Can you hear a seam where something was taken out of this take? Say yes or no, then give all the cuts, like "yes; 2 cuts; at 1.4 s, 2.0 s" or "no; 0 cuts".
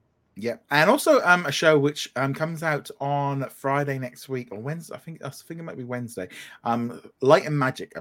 no; 0 cuts